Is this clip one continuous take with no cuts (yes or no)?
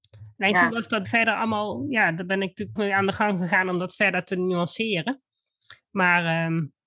no